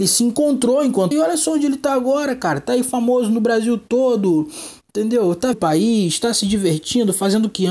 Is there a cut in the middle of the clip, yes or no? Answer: yes